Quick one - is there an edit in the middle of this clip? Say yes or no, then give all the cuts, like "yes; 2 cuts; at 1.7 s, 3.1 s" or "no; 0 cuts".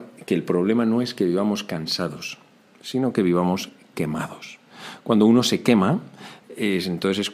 no; 0 cuts